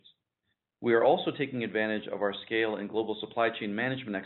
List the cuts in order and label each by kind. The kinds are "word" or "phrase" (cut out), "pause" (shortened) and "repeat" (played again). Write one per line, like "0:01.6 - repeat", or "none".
none